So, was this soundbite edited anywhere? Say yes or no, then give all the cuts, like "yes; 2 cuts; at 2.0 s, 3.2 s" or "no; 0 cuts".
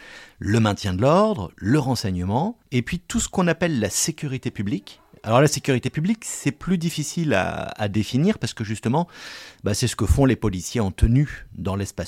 yes; 1 cut; at 2.6 s